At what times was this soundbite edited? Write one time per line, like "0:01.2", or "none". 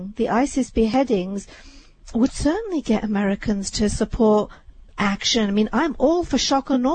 0:04.9